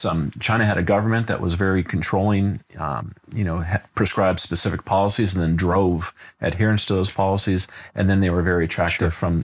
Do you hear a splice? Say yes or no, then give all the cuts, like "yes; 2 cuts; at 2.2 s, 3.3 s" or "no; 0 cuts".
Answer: no; 0 cuts